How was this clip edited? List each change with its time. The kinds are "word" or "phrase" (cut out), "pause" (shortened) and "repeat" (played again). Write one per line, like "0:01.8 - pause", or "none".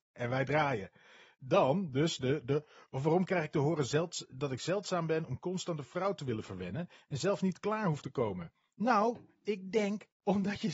none